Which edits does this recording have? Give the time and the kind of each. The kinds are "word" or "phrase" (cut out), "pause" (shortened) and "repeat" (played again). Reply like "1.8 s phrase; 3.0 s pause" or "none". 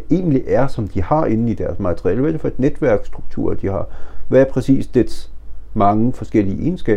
none